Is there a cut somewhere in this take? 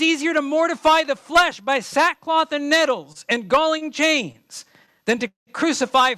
no; 0 cuts

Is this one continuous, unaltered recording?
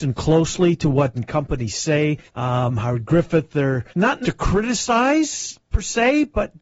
no; 4 cuts; at 1.1 s, 2.3 s, 3.9 s, 4.2 s

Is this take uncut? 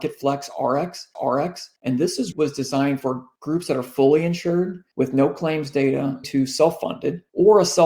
no; 3 cuts; at 1.1 s, 2.3 s, 6.2 s

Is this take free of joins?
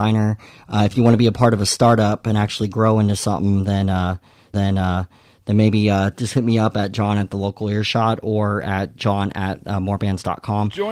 no; 1 cut; at 4.5 s

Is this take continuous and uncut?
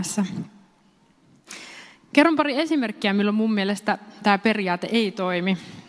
yes; 0 cuts

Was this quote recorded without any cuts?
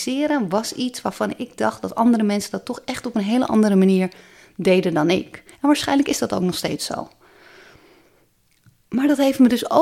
yes; 0 cuts

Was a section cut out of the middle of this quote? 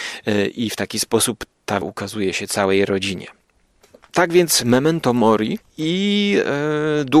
yes; 2 cuts; at 1.8 s, 5.7 s

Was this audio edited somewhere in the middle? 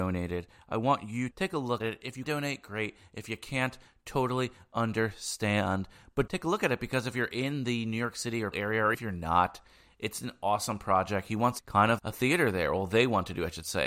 yes; 8 cuts; at 1.3 s, 1.8 s, 2.2 s, 6.3 s, 8.5 s, 8.9 s, 11.6 s, 12.0 s

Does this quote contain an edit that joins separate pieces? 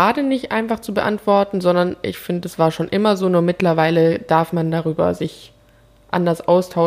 no; 0 cuts

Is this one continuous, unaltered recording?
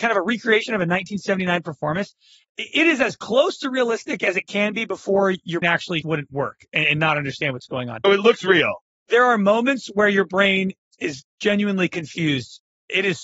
no; 3 cuts; at 5.6 s, 6.0 s, 8.0 s

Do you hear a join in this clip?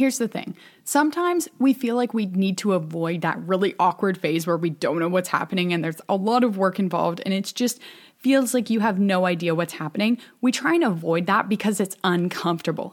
no; 0 cuts

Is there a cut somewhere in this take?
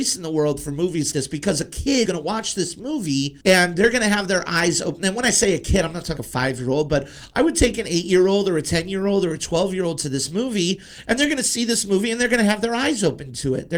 yes; 4 cuts; at 1.1 s, 2.1 s, 3.4 s, 6.2 s

